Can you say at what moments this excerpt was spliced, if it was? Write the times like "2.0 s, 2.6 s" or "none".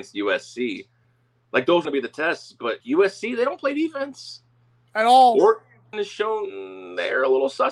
1.8 s, 2.8 s, 5.9 s